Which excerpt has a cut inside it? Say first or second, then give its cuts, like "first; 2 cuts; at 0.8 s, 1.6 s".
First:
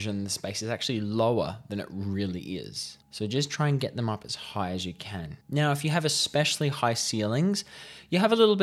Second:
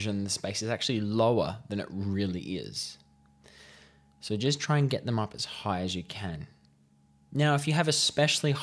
first; 2 cuts; at 3.0 s, 5.4 s